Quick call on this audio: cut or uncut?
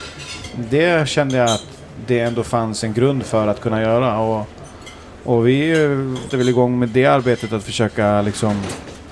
cut